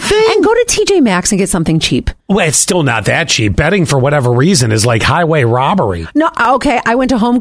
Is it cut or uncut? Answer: cut